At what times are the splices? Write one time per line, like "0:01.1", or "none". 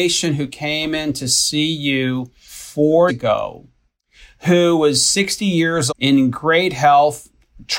0:03.1
0:05.9